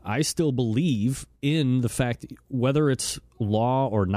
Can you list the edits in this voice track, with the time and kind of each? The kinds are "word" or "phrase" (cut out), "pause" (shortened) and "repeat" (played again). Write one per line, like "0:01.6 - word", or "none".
0:01.4 - pause